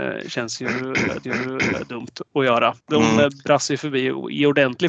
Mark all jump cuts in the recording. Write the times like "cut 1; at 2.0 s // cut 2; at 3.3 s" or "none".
cut 1; at 1.2 s // cut 2; at 2.8 s